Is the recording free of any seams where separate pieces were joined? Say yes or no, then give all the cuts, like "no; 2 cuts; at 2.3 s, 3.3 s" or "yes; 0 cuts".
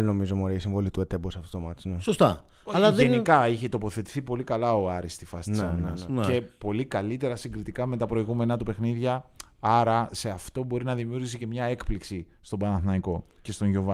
yes; 0 cuts